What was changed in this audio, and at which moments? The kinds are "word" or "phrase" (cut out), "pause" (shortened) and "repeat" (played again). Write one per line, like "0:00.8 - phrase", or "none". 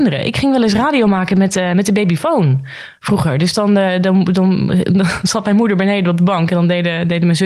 none